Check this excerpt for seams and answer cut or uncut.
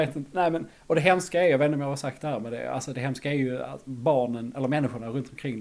uncut